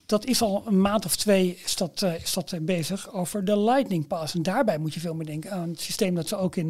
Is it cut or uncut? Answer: uncut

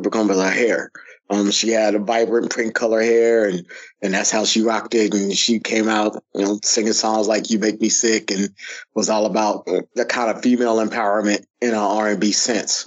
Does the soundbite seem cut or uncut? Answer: cut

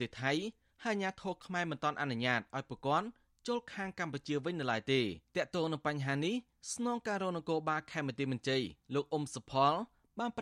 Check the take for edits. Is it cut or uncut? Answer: cut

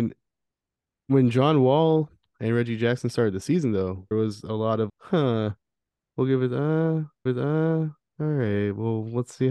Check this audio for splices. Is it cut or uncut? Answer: cut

